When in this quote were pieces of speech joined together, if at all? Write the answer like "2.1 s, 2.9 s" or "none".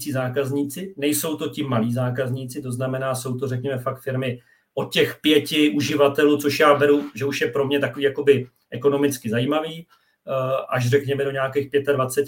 none